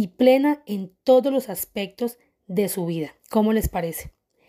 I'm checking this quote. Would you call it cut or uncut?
cut